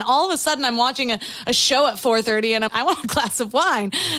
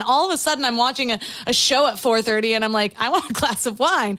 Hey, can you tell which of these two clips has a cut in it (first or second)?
first